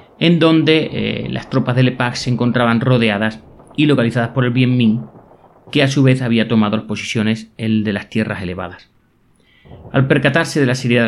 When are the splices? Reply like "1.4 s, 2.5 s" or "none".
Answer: none